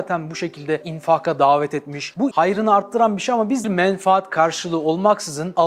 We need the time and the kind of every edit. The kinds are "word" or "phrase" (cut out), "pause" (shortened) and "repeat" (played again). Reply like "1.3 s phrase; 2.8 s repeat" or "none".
2.3 s word; 3.6 s phrase